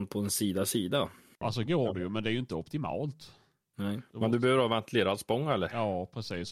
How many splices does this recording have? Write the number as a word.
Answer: one